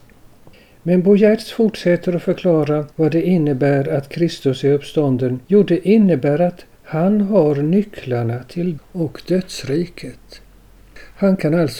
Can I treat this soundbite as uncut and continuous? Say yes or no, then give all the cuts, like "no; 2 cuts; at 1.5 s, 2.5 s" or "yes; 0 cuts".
no; 4 cuts; at 2.9 s, 5.4 s, 6.7 s, 8.8 s